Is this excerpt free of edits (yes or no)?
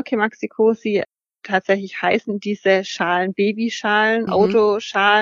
no